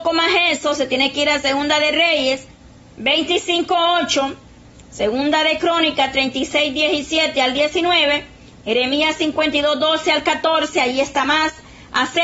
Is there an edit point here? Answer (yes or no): no